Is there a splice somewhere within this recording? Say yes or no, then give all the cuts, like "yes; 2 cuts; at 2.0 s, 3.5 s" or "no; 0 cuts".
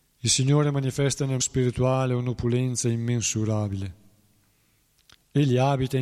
yes; 1 cut; at 1.4 s